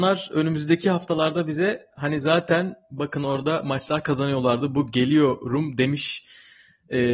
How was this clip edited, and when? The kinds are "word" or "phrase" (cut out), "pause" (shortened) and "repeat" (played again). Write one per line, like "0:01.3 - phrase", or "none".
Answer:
none